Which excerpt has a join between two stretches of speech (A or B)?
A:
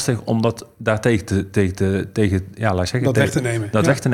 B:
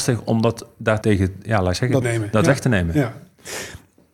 B